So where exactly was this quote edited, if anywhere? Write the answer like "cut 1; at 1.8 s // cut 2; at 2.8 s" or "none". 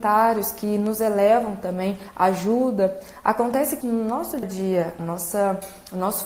cut 1; at 3.8 s // cut 2; at 4.4 s // cut 3; at 5.0 s